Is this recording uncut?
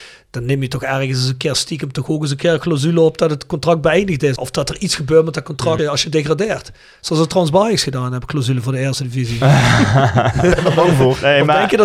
yes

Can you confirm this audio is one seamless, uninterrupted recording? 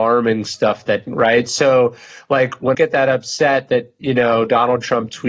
no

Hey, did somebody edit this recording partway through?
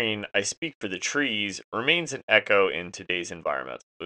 no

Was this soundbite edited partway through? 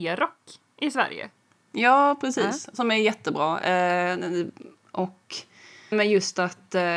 yes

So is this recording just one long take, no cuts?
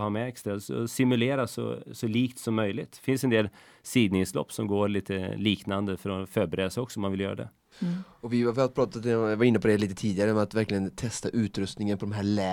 yes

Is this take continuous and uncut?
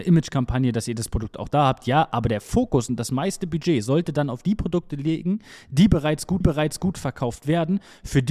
no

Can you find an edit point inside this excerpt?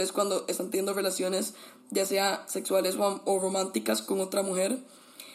no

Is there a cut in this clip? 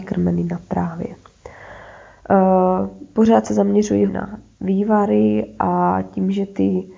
yes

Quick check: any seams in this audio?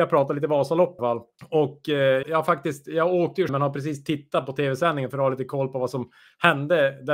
yes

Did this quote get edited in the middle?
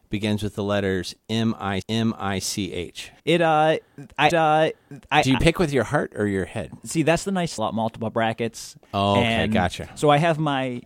yes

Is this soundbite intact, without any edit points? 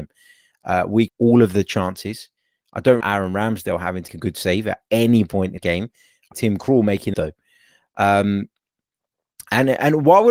no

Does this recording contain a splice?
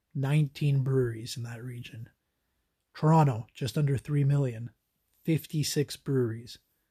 no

